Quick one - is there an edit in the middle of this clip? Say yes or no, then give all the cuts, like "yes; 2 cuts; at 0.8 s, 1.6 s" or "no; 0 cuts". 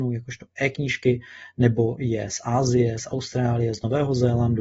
no; 0 cuts